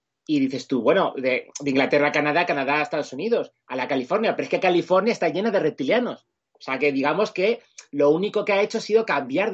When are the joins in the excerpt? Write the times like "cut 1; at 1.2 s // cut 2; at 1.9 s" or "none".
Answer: cut 1; at 6.4 s